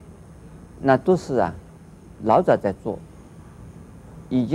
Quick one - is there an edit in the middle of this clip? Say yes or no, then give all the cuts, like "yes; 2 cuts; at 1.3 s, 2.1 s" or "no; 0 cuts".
yes; 1 cut; at 2.2 s